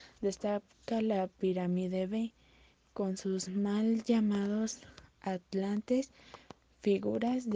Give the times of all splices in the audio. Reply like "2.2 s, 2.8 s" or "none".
none